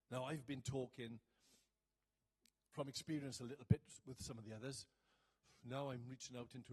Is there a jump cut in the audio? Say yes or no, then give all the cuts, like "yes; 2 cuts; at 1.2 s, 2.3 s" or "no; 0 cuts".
no; 0 cuts